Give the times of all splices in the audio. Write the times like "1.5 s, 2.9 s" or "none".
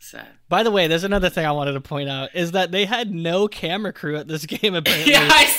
none